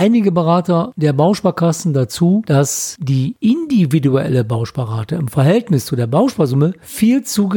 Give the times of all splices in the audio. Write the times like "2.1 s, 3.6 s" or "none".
none